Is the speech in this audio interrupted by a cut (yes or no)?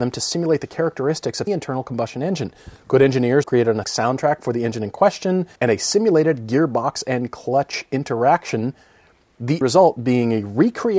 yes